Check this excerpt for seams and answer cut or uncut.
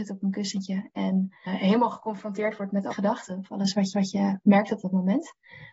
cut